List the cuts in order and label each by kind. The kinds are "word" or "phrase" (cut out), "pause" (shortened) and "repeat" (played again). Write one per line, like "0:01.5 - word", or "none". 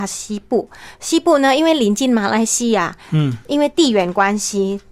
none